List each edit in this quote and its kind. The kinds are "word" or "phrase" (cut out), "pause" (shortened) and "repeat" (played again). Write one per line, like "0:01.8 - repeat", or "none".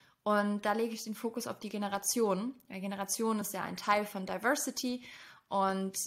none